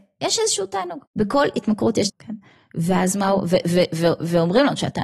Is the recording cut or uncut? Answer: cut